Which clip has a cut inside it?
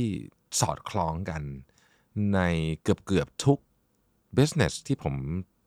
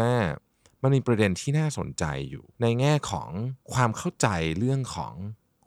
second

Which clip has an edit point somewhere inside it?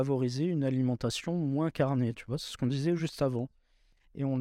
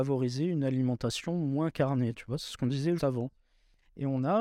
second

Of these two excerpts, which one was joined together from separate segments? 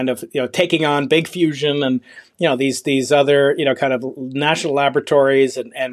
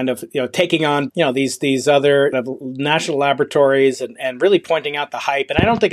second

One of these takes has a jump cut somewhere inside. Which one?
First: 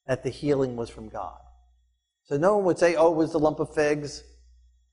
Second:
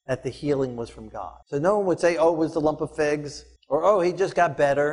second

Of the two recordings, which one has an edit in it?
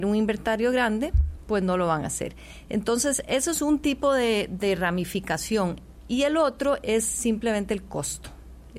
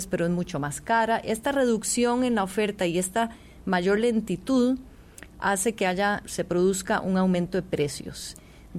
second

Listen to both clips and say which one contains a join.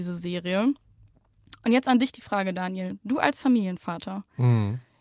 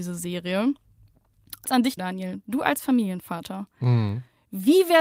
second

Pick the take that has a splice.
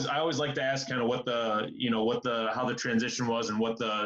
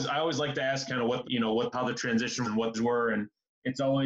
second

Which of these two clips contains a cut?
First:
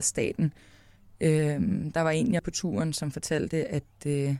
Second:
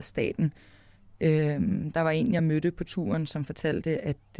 first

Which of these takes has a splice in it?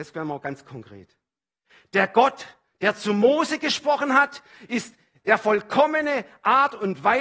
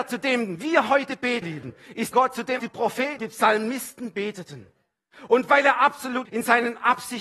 second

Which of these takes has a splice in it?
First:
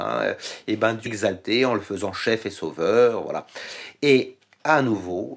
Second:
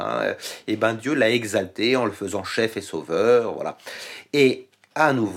first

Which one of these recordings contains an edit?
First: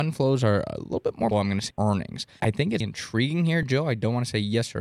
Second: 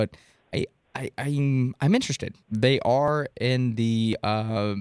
first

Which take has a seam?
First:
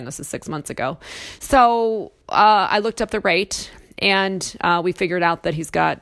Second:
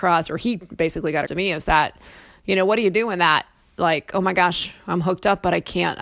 second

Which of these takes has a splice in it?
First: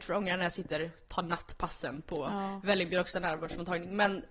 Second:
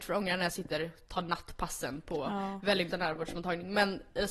second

